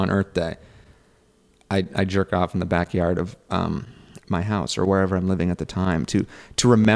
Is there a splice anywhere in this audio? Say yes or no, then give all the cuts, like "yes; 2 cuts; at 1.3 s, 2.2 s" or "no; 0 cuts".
no; 0 cuts